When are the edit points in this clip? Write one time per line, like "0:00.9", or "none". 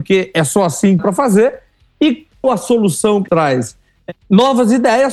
0:01.0
0:02.4
0:03.3